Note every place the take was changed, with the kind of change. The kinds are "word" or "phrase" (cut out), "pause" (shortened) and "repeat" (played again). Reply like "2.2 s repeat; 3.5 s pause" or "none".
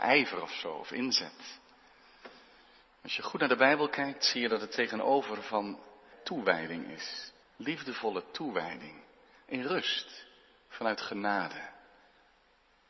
6.1 s word; 7.4 s pause